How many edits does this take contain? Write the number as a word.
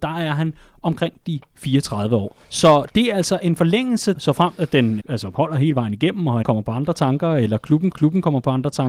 five